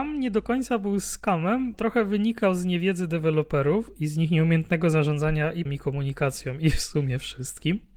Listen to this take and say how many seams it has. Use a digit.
2